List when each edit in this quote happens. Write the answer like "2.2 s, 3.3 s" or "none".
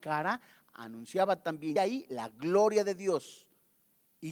1.8 s